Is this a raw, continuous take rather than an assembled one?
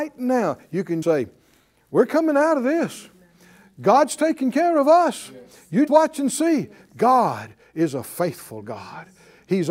no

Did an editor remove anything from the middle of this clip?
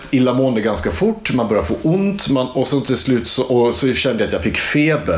no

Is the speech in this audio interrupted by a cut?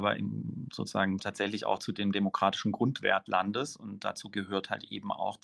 yes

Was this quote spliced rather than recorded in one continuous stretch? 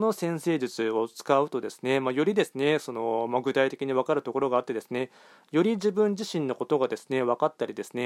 no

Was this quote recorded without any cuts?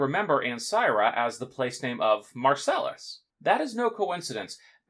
no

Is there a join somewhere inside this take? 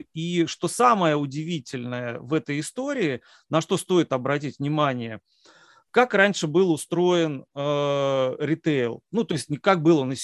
no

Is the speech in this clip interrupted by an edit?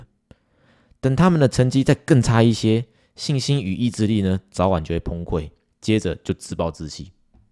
no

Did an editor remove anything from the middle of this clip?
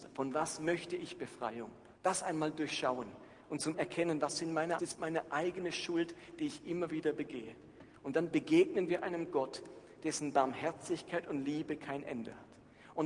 yes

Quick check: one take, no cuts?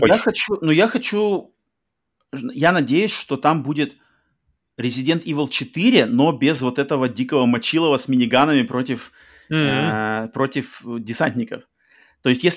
yes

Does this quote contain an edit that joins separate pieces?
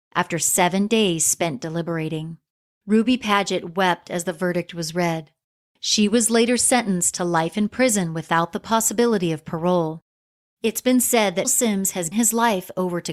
yes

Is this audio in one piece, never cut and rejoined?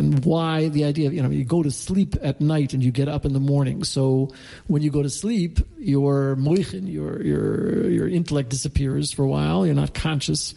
yes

